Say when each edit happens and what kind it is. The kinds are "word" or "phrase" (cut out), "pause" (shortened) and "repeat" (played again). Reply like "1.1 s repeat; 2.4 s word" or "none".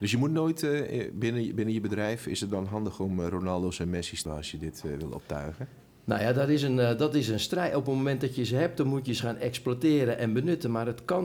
4.3 s word